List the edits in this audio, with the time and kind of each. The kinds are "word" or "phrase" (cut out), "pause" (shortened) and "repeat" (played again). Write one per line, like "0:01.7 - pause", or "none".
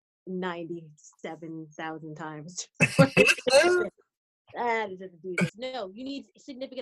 0:05.5 - phrase

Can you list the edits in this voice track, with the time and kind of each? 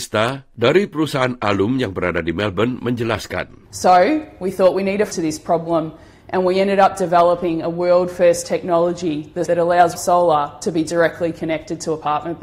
0:03.7 - pause
0:05.1 - phrase
0:09.4 - word
0:09.9 - word

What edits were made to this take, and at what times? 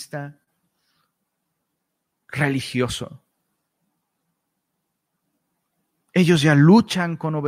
none

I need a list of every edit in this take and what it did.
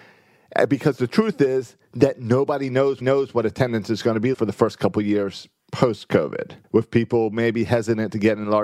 0:03.0 - repeat
0:04.3 - word
0:06.6 - pause

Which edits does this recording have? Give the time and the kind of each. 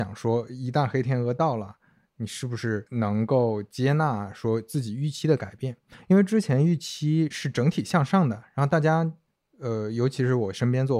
none

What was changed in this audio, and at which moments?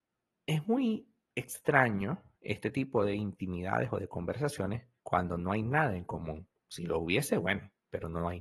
0:02.3 - pause
0:05.0 - pause

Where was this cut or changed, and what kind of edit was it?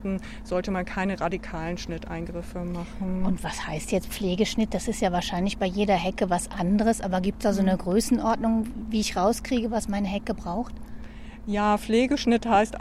none

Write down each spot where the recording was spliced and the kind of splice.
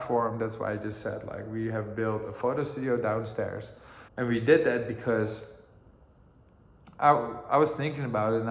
0:04.1 - pause

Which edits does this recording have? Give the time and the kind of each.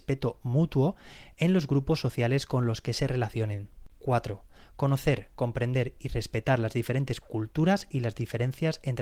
none

